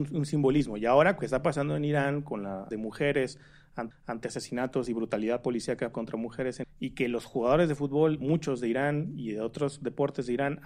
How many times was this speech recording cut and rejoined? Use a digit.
5